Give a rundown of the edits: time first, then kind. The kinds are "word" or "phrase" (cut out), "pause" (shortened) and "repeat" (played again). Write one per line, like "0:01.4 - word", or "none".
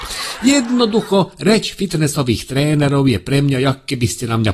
none